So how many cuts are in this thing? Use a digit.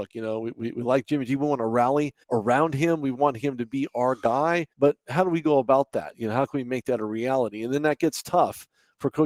2